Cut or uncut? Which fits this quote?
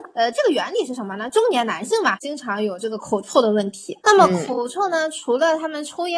cut